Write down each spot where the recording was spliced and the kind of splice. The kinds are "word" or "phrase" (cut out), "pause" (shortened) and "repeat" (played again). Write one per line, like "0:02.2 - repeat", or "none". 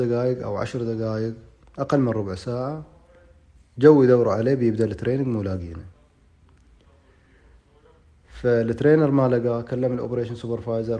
none